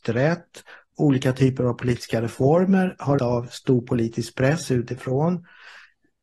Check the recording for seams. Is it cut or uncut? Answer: cut